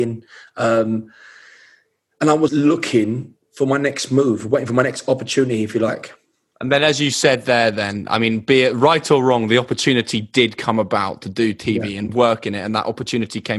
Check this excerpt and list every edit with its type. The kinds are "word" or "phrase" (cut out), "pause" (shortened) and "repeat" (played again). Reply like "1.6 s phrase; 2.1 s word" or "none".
2.5 s word